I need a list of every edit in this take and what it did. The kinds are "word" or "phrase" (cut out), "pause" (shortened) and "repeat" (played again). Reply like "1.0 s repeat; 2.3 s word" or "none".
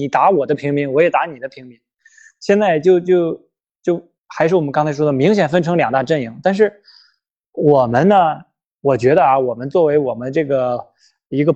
4.2 s pause